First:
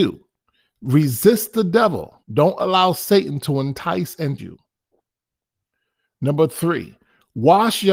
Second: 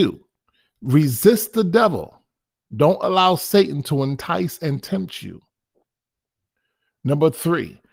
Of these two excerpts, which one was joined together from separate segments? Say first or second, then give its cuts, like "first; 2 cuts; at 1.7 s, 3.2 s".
first; 2 cuts; at 2.2 s, 4.4 s